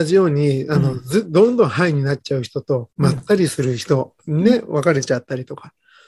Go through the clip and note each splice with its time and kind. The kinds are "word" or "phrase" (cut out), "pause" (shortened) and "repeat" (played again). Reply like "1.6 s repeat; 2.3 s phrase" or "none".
2.9 s pause